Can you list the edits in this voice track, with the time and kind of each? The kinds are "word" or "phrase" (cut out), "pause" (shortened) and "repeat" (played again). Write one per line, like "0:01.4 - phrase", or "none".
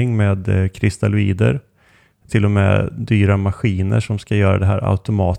0:02.3 - word